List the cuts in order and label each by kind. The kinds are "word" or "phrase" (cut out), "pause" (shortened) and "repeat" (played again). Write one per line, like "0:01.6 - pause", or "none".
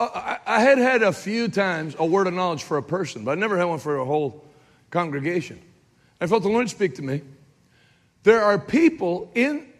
none

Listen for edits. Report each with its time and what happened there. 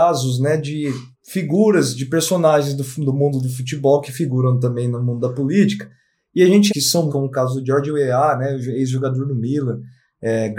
0:01.1 - pause
0:06.7 - phrase
0:07.1 - phrase

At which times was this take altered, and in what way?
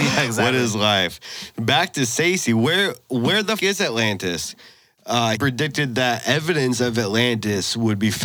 0:03.6 - word
0:05.3 - word

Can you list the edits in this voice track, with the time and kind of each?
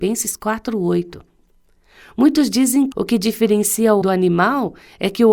0:02.9 - word
0:04.0 - word

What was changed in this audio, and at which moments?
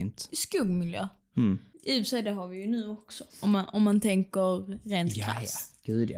0:01.7 - pause
0:03.3 - pause

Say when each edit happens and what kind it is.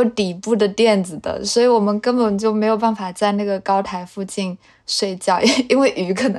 none

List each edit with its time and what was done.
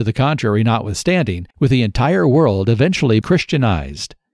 0:01.5 - pause
0:03.2 - word

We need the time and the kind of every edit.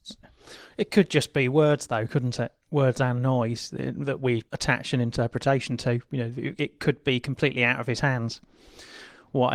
0:04.5 - word

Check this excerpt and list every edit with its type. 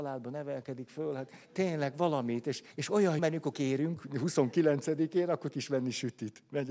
0:01.4 - pause
0:02.7 - pause
0:03.2 - word
0:03.5 - word
0:05.5 - word

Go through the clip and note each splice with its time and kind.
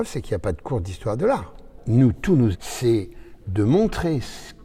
0:02.5 - word
0:03.4 - word

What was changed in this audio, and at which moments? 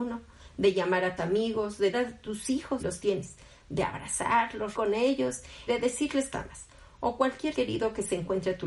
0:01.2 - word
0:01.9 - word
0:02.8 - word
0:04.7 - word
0:05.7 - word
0:06.3 - word
0:07.5 - word

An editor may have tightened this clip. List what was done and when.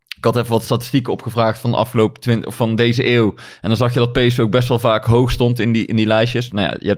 none

